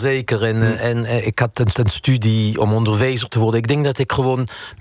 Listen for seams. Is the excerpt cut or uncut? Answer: cut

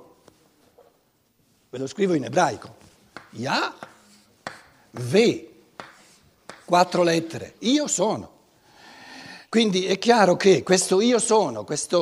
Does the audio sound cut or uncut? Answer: cut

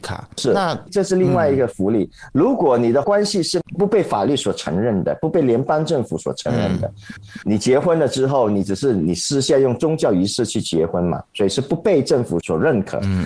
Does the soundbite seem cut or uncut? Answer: cut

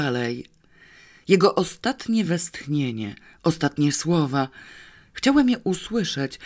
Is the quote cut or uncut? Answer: uncut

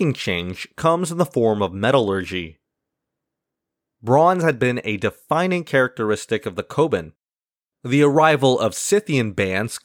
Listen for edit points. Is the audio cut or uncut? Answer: uncut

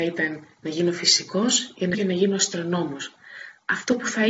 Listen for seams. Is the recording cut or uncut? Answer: cut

